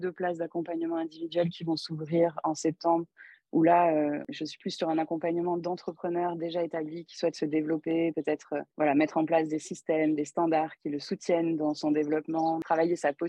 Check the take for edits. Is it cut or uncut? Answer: cut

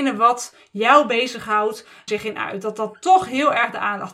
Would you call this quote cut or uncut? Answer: cut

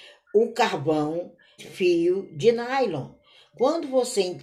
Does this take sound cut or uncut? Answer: cut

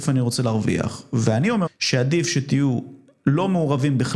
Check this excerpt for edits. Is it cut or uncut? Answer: cut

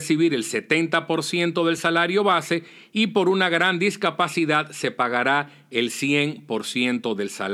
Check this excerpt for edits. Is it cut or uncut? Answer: uncut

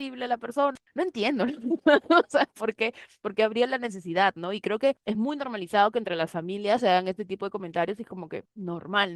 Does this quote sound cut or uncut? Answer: uncut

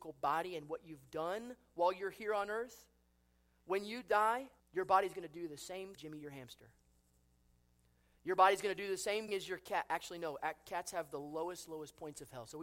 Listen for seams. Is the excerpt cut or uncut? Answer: cut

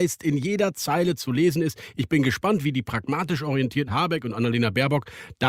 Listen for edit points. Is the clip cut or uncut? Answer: cut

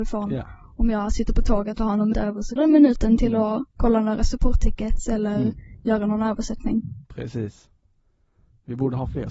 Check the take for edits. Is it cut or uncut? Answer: cut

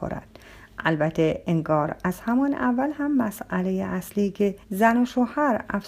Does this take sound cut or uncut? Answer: cut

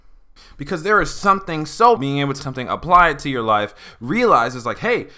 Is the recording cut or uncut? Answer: cut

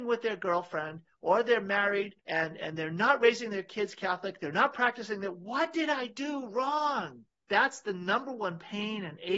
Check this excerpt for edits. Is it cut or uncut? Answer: cut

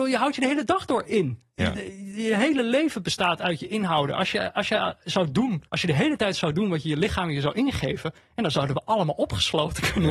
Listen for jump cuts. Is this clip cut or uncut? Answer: cut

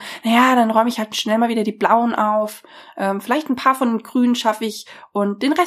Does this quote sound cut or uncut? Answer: uncut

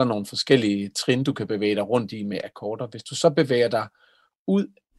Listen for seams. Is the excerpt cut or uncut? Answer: uncut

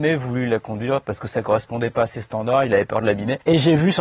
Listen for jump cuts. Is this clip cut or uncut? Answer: uncut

